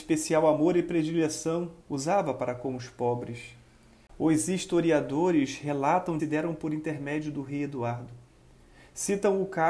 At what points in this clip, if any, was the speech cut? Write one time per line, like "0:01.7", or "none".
0:01.8
0:06.2